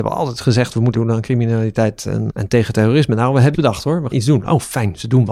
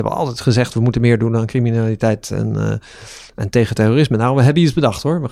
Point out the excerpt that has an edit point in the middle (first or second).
first